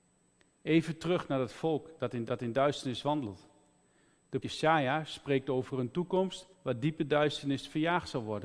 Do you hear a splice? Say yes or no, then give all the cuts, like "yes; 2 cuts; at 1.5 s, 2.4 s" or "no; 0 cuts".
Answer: yes; 3 cuts; at 2.3 s, 4.4 s, 6.5 s